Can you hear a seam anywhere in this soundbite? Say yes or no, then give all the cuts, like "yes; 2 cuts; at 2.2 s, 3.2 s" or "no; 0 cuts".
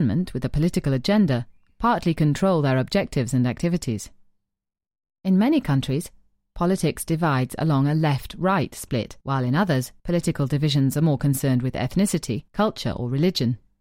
yes; 3 cuts; at 9.2 s, 10.0 s, 12.5 s